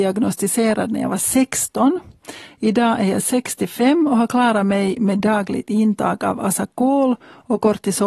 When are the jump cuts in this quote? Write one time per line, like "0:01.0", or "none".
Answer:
none